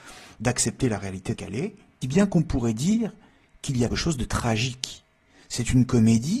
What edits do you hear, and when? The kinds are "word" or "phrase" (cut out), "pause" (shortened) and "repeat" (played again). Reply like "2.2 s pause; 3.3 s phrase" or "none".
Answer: 1.3 s word; 2.0 s word; 3.9 s word